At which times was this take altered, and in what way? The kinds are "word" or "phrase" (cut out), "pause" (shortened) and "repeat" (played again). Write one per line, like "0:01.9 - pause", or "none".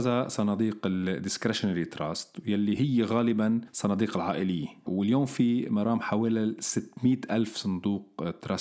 none